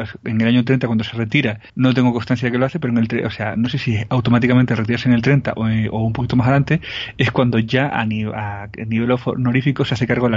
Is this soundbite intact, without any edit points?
no; 1 cut; at 1.7 s

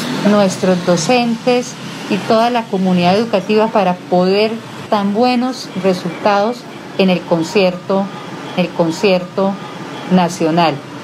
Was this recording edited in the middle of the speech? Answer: yes; 3 cuts; at 3.7 s, 4.9 s, 8.6 s

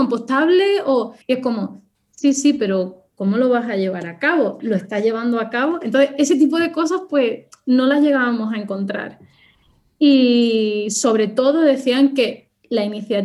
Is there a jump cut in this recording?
yes; 1 cut; at 1.2 s

